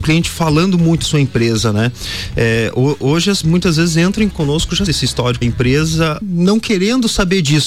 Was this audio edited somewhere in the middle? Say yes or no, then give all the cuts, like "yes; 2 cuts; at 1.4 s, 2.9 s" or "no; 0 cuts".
yes; 6 cuts; at 1.0 s, 3.4 s, 4.3 s, 4.9 s, 5.4 s, 6.2 s